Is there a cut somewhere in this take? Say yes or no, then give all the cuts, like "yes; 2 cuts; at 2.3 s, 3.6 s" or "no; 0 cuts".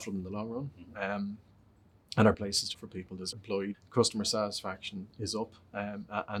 yes; 4 cuts; at 2.3 s, 2.7 s, 3.3 s, 3.7 s